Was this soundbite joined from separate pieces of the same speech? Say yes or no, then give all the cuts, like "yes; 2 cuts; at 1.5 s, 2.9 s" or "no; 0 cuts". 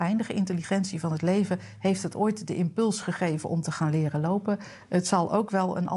no; 0 cuts